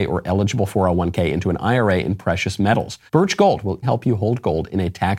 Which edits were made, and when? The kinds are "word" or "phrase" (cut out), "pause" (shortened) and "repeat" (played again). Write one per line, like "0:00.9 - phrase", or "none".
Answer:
0:03.1 - pause
0:03.8 - word